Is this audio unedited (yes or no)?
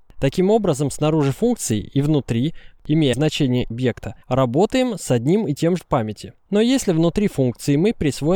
no